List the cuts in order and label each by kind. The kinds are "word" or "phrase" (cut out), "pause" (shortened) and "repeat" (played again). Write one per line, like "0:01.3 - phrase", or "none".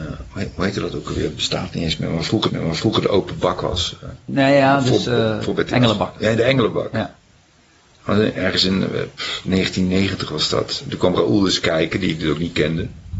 0:02.5 - repeat
0:04.2 - pause